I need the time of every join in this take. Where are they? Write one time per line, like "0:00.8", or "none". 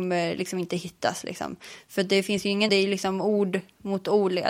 0:02.7